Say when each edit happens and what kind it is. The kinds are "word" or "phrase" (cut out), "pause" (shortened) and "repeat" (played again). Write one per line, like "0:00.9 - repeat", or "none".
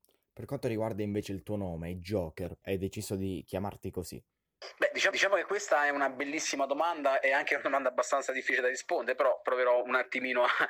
0:02.6 - word
0:05.1 - repeat